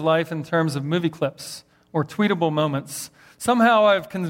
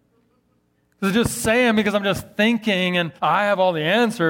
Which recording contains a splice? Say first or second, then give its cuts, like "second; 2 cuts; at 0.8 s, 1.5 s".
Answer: second; 1 cut; at 3.2 s